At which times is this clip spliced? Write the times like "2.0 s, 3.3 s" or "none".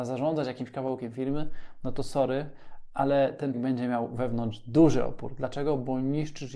3.5 s